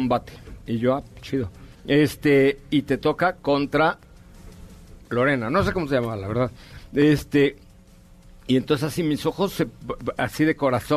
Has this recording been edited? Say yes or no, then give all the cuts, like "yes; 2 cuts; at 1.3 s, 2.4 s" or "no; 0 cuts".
yes; 1 cut; at 1.7 s